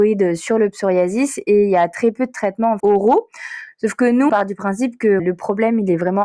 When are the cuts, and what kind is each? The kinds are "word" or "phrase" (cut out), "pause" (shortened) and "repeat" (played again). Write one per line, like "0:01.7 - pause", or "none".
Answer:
0:02.8 - word
0:04.3 - word
0:05.2 - word